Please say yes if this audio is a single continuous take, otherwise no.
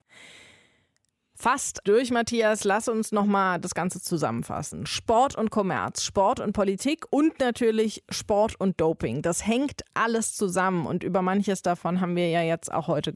no